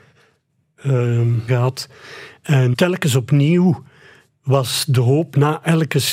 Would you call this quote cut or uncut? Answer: cut